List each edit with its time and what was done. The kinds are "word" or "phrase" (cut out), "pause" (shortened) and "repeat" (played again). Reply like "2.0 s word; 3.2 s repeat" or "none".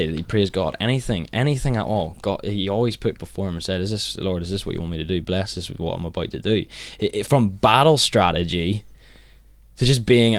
3.2 s word; 7.3 s word

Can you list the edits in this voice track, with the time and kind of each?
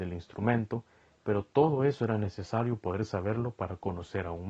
none

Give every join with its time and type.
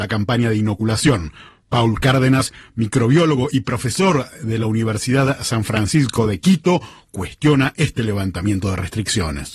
none

